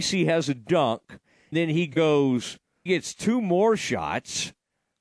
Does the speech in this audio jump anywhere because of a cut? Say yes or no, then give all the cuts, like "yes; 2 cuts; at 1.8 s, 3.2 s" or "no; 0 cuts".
yes; 2 cuts; at 1.5 s, 2.9 s